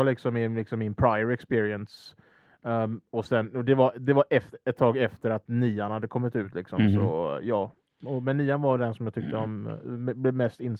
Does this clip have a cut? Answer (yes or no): no